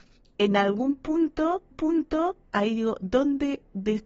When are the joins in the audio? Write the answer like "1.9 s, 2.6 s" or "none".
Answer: 1.7 s